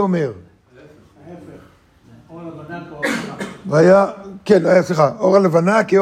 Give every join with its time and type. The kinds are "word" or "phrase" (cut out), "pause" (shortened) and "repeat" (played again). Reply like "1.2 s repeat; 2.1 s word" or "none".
none

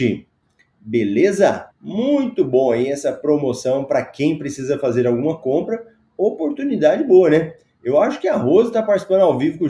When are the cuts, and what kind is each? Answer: 1.7 s pause

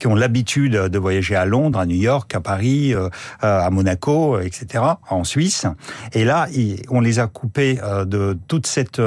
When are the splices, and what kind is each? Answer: none

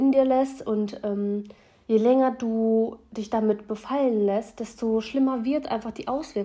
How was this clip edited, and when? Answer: none

